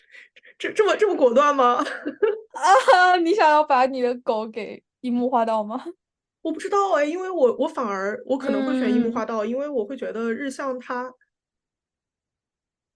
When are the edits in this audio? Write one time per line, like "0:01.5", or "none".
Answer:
0:06.1